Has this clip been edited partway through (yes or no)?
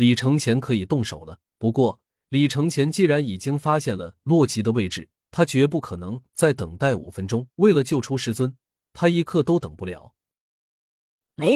yes